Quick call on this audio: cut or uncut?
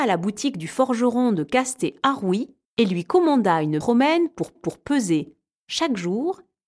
cut